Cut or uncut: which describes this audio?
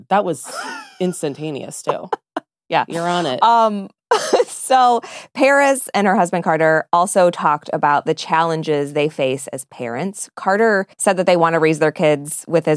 cut